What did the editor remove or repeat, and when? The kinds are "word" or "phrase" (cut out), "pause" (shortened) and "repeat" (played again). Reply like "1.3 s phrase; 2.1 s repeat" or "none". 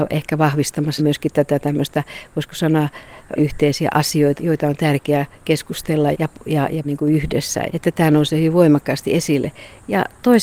1.0 s word; 3.4 s word; 4.4 s word; 6.1 s word; 6.8 s word; 7.7 s word